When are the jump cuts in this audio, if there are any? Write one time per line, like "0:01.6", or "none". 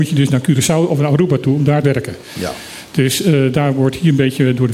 0:01.8